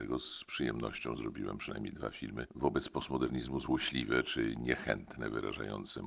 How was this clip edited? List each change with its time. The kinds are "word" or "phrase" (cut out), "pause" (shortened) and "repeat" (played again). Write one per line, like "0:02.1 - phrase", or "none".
none

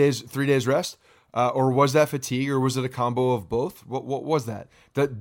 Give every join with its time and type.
none

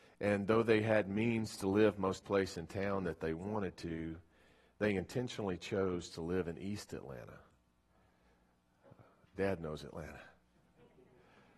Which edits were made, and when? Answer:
0:02.2 - word

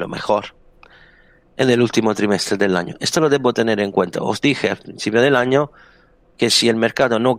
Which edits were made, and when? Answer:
none

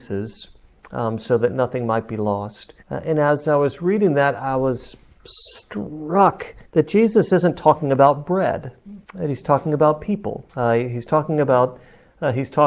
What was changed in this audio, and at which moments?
0:02.8 - pause
0:06.6 - pause
0:09.0 - pause
0:10.5 - pause

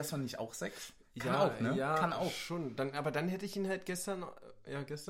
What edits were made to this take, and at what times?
0:01.0 - pause

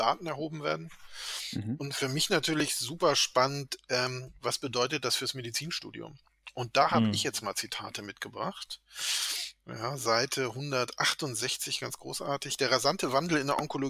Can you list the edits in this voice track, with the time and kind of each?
none

